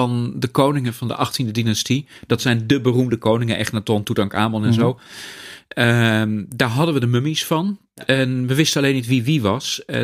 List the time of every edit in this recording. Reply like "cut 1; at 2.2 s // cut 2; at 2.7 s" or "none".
none